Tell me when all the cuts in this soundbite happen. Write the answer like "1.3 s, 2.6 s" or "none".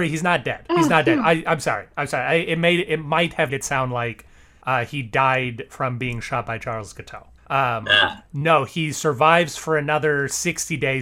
3.5 s, 7.4 s